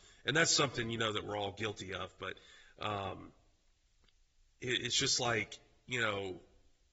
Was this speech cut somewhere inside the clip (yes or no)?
no